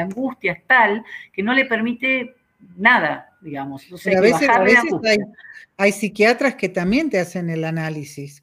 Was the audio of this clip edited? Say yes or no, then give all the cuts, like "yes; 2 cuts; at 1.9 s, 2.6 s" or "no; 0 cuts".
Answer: no; 0 cuts